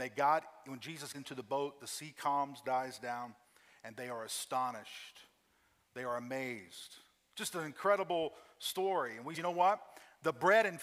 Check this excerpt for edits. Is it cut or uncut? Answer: cut